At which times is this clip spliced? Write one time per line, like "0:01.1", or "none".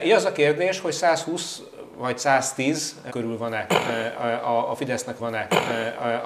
0:03.1
0:05.2